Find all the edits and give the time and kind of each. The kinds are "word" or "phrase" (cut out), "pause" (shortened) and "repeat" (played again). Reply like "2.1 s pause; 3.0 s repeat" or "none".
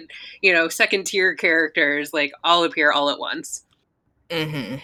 none